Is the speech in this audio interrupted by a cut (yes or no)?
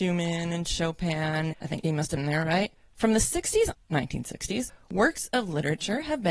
yes